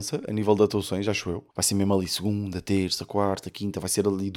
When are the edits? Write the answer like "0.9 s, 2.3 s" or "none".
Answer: 1.5 s